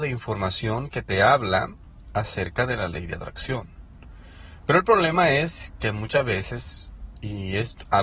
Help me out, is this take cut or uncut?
uncut